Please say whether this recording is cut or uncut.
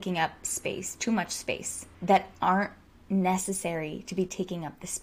cut